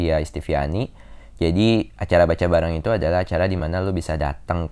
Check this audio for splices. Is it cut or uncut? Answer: uncut